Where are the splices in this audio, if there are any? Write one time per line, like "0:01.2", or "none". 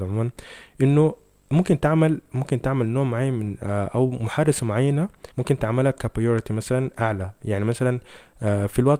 0:05.3